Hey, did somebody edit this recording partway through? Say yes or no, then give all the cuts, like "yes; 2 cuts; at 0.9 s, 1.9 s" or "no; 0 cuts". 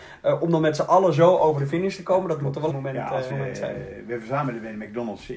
yes; 2 cuts; at 2.7 s, 3.3 s